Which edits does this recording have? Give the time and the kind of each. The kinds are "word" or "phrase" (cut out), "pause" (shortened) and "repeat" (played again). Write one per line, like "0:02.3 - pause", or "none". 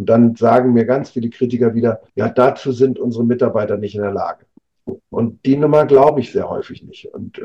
0:02.1 - pause
0:05.0 - pause